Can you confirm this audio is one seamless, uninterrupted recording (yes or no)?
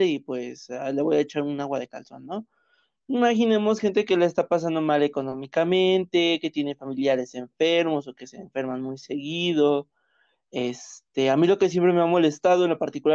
yes